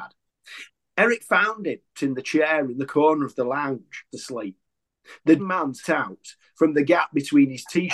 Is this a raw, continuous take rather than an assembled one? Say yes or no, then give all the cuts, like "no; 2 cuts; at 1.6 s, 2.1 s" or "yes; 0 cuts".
no; 4 cuts; at 2.0 s, 4.1 s, 5.4 s, 5.8 s